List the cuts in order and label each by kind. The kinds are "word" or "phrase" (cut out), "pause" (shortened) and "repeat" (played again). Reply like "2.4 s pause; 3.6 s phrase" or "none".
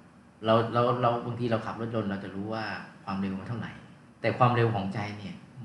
4.1 s pause